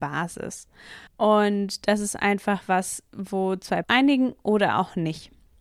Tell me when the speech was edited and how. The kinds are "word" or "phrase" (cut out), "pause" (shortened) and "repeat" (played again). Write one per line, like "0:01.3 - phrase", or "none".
0:01.1 - pause
0:03.8 - phrase